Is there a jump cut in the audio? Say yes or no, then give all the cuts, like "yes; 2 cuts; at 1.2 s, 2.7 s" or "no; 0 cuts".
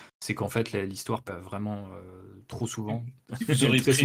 yes; 1 cut; at 1.3 s